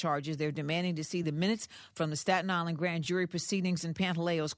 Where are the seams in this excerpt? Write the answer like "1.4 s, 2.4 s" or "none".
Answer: none